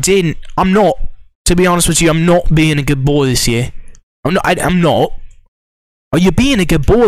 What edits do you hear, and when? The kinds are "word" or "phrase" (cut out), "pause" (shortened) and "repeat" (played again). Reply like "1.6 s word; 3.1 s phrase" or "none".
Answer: none